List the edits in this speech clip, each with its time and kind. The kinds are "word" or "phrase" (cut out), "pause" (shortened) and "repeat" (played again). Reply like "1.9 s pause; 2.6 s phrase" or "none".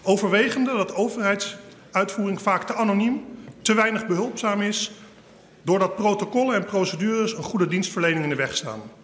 none